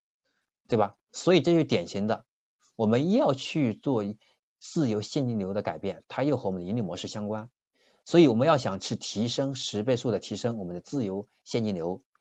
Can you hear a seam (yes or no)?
no